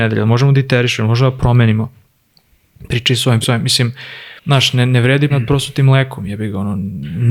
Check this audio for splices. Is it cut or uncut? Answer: cut